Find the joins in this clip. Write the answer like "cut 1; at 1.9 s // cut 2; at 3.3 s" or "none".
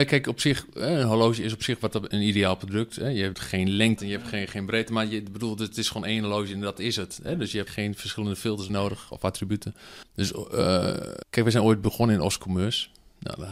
cut 1; at 3.3 s // cut 2; at 4.0 s // cut 3; at 7.7 s // cut 4; at 8.7 s // cut 5; at 10.0 s // cut 6; at 11.2 s